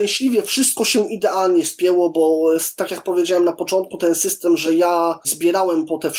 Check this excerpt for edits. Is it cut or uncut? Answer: uncut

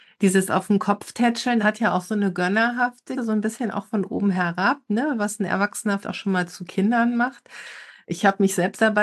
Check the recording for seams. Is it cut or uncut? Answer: cut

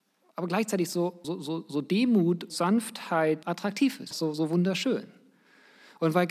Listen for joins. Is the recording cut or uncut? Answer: cut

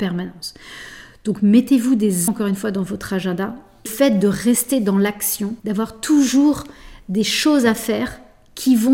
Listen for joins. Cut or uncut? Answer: cut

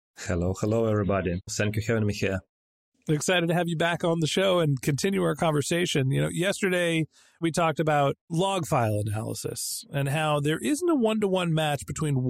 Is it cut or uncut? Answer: uncut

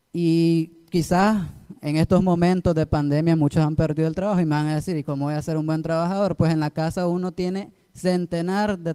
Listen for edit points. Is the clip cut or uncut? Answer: uncut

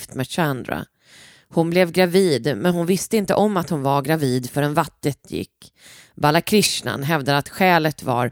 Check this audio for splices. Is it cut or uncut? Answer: uncut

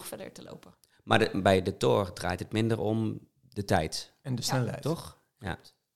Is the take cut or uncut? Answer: uncut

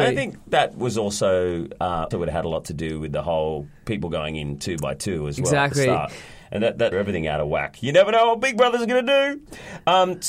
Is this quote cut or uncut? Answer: cut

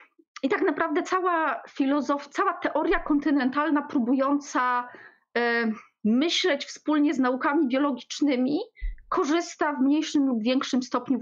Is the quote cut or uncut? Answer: uncut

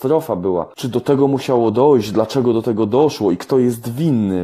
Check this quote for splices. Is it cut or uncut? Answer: uncut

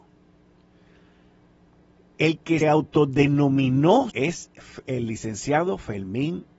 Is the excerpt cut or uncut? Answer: cut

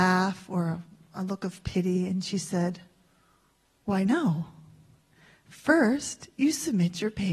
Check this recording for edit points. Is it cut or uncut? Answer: uncut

